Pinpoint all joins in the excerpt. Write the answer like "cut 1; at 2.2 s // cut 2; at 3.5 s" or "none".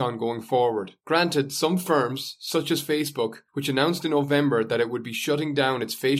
cut 1; at 1.0 s // cut 2; at 3.5 s